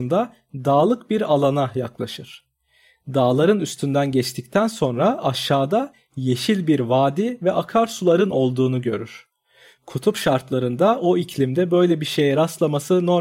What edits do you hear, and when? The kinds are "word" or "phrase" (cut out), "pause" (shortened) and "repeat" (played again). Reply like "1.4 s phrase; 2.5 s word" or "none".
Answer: none